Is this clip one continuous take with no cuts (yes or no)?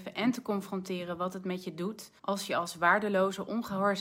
no